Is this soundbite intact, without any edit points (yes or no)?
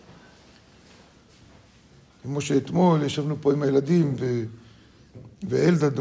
yes